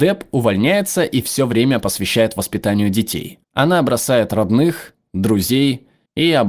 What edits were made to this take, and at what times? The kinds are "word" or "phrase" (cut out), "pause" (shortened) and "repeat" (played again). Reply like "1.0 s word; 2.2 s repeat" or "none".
3.4 s pause